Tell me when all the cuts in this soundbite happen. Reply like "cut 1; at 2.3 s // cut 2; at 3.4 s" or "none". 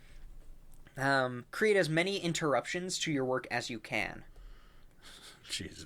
cut 1; at 1.5 s